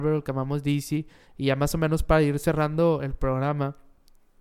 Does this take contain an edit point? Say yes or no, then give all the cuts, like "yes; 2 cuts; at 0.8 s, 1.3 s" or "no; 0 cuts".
no; 0 cuts